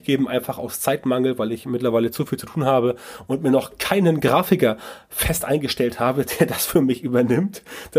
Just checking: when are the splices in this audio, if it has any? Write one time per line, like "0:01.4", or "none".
none